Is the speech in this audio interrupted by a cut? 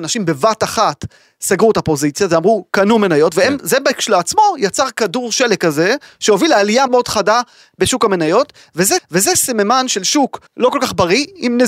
yes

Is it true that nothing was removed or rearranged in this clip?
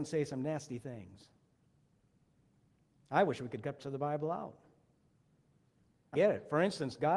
no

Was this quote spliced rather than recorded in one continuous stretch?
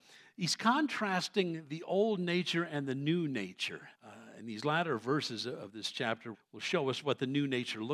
yes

